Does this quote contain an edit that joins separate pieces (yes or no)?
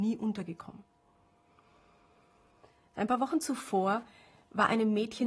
no